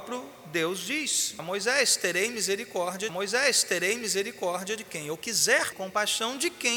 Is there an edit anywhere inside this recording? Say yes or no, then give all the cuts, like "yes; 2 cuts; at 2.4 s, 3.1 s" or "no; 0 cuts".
yes; 3 cuts; at 1.4 s, 3.1 s, 5.7 s